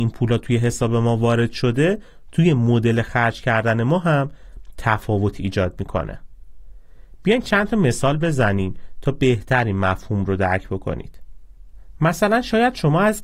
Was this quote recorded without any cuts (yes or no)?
yes